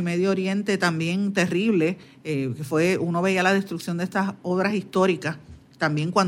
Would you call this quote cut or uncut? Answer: uncut